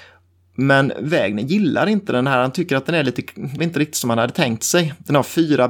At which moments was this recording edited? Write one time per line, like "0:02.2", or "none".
0:03.6